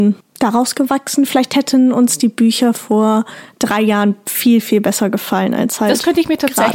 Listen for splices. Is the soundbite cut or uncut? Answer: uncut